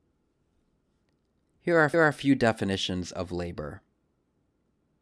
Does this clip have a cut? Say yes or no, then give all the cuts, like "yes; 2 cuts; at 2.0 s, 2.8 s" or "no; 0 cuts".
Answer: yes; 1 cut; at 1.9 s